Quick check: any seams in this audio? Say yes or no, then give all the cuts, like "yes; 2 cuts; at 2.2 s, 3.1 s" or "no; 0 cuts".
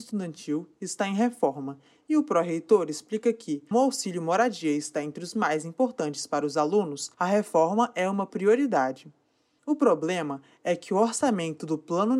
yes; 2 cuts; at 3.7 s, 7.1 s